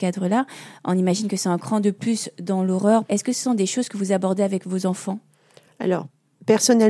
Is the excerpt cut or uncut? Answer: uncut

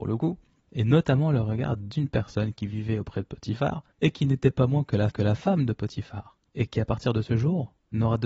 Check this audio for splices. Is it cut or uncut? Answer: cut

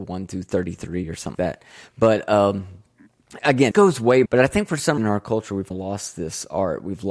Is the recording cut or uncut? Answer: cut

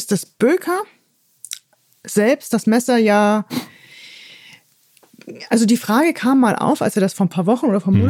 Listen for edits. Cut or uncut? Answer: uncut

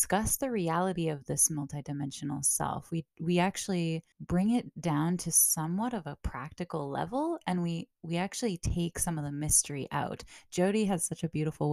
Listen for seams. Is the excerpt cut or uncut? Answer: cut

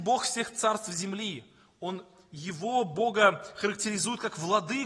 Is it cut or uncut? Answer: uncut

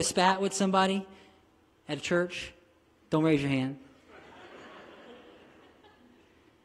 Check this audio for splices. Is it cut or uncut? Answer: uncut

